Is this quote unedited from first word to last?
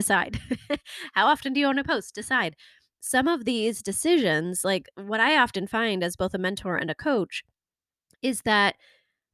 yes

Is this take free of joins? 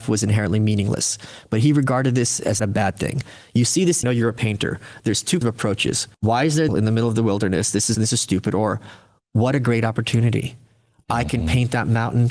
no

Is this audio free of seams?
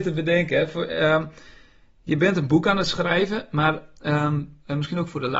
yes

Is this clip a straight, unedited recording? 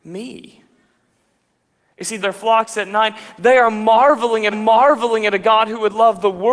no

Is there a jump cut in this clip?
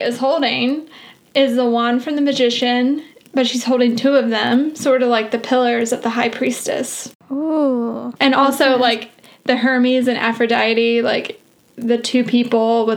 no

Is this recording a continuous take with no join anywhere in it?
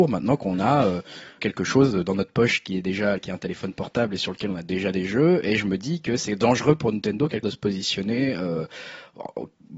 no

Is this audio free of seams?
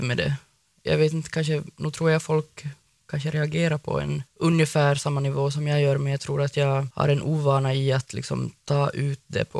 yes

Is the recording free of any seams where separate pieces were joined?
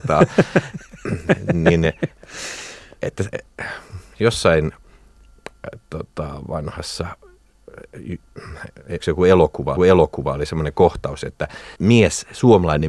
no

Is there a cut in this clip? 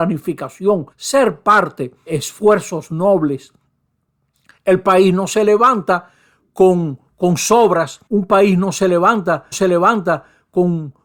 yes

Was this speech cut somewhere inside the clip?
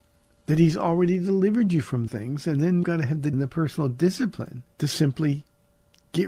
yes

